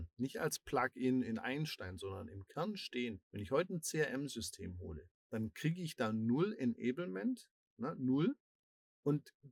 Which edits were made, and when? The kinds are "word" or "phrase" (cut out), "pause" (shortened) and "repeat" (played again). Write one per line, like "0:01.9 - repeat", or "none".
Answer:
0:03.2 - pause
0:05.2 - pause